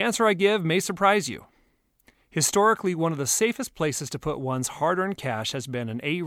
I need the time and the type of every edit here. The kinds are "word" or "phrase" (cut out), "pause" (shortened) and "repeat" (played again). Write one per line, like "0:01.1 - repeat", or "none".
none